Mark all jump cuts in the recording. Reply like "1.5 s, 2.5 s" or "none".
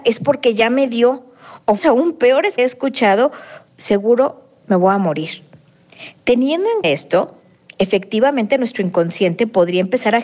1.8 s, 2.6 s, 3.7 s, 6.8 s